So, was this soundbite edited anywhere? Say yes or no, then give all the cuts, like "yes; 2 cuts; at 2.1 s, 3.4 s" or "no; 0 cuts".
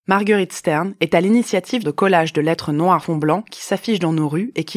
yes; 2 cuts; at 1.8 s, 3.0 s